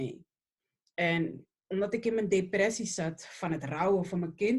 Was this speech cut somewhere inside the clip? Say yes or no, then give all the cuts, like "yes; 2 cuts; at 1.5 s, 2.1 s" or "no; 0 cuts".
no; 0 cuts